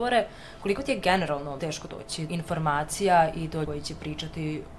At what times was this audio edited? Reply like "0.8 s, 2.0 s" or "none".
1.6 s, 2.3 s, 3.6 s